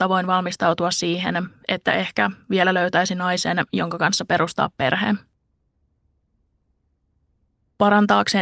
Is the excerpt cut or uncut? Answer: uncut